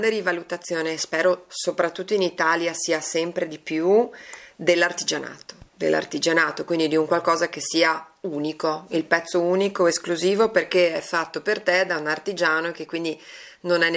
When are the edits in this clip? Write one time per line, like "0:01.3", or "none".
0:05.7